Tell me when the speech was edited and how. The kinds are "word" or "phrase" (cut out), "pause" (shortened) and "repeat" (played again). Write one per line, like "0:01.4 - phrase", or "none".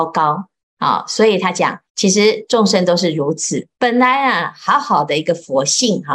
0:01.9 - pause
0:03.7 - pause

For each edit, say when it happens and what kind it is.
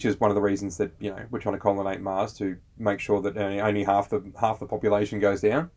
0:02.6 - pause

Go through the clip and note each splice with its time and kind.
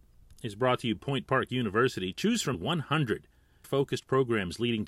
0:01.0 - word
0:02.5 - word
0:03.6 - word

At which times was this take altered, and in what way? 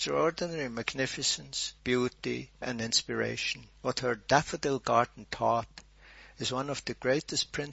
0:01.8 - pause
0:03.8 - pause

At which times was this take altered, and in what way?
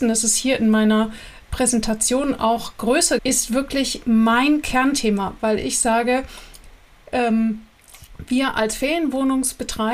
0:03.2 - word

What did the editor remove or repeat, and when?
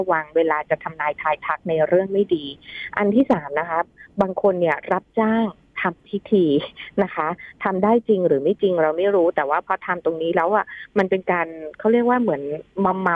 none

